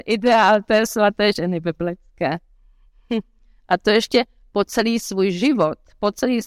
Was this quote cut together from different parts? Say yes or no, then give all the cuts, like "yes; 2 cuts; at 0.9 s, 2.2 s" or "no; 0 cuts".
no; 0 cuts